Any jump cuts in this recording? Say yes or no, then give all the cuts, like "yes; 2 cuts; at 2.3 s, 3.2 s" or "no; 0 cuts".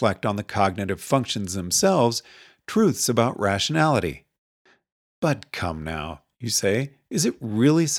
no; 0 cuts